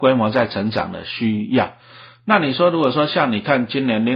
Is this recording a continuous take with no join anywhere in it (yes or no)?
yes